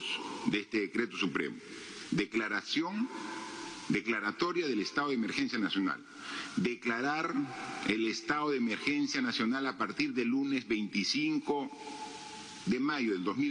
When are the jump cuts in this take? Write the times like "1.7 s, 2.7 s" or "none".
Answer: none